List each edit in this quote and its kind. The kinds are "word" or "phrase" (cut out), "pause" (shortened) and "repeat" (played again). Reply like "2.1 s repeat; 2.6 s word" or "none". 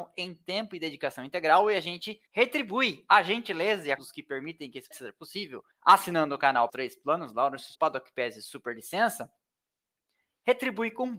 2.3 s pause; 4.0 s word; 4.9 s phrase; 5.7 s pause; 6.7 s word; 7.7 s word